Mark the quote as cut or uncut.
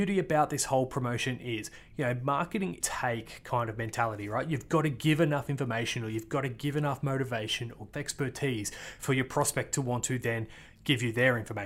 cut